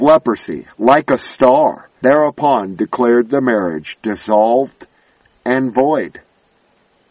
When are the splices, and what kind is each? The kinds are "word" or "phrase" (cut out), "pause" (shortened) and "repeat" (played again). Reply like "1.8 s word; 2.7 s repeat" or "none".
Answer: 2.0 s word